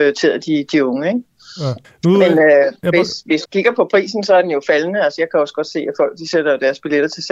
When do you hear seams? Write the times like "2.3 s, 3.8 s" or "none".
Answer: 1.8 s, 3.4 s